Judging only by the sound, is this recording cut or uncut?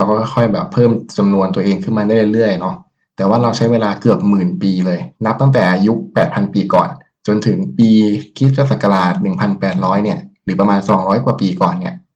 cut